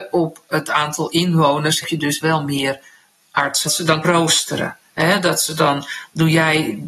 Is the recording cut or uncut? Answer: cut